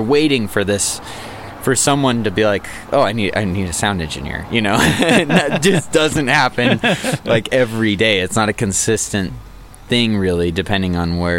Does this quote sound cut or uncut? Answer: uncut